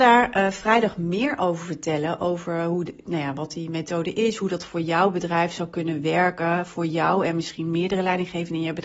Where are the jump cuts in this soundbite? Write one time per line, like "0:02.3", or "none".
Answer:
none